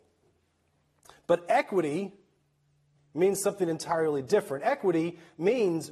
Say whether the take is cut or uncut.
uncut